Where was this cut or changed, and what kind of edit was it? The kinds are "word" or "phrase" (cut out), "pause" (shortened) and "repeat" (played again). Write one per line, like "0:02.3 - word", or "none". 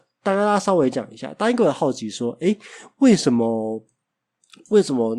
none